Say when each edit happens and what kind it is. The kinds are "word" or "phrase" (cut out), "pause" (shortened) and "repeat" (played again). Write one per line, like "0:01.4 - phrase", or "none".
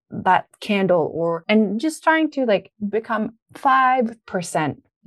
0:03.4 - pause